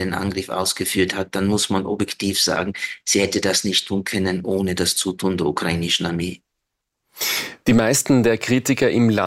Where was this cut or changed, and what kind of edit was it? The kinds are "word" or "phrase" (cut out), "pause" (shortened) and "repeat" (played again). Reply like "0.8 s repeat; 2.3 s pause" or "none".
none